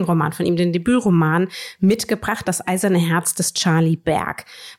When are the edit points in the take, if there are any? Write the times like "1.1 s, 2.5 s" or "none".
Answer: none